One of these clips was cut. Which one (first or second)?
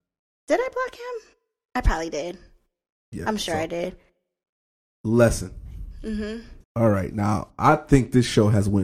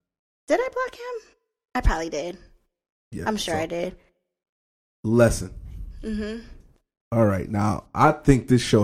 first